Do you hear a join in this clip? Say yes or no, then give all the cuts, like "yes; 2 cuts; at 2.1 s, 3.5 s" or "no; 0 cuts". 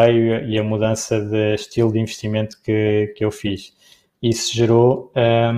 no; 0 cuts